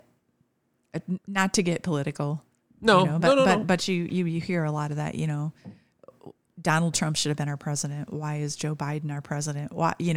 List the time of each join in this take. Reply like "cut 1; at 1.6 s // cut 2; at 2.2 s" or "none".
none